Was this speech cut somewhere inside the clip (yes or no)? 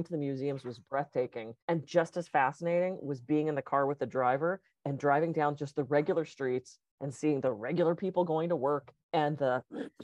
yes